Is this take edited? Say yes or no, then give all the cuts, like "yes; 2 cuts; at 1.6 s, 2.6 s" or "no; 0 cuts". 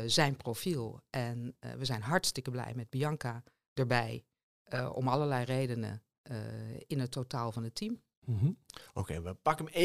no; 0 cuts